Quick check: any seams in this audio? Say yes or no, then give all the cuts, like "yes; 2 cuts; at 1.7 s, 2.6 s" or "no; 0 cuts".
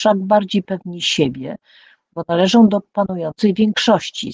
no; 0 cuts